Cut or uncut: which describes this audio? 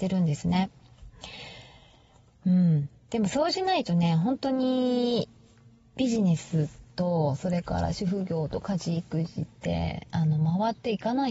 uncut